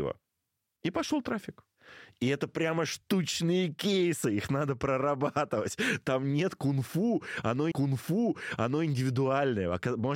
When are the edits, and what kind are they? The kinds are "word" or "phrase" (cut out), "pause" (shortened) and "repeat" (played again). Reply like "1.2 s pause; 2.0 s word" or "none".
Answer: 7.7 s repeat